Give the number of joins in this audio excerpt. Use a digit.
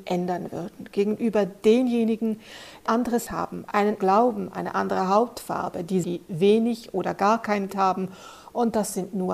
5